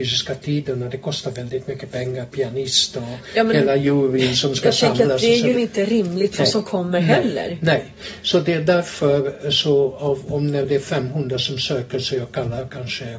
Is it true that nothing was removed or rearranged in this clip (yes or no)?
no